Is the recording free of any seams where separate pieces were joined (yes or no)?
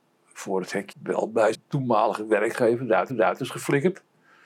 no